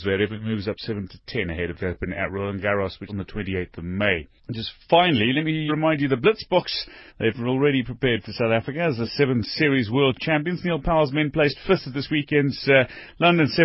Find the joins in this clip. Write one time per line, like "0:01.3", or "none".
0:01.1
0:01.8
0:03.1
0:04.4
0:05.7
0:07.1
0:08.2